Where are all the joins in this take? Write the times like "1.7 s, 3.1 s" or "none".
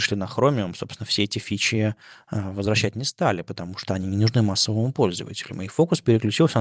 none